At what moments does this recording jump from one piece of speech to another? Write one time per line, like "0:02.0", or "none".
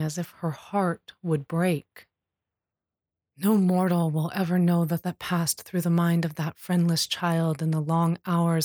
0:05.0